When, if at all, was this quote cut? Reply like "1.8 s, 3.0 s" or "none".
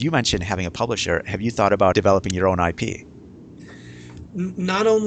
1.9 s